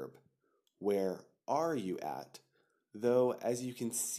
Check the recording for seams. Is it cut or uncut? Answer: uncut